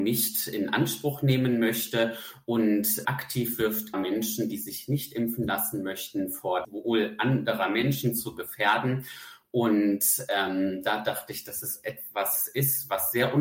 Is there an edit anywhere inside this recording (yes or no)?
yes